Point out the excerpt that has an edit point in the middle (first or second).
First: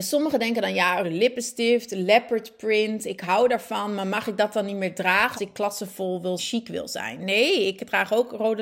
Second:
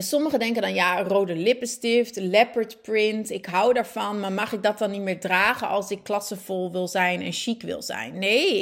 first